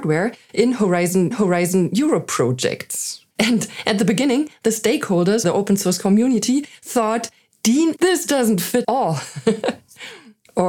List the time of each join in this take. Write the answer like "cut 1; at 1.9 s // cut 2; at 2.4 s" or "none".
cut 1; at 1.3 s // cut 2; at 3.3 s // cut 3; at 5.4 s // cut 4; at 8.0 s // cut 5; at 8.8 s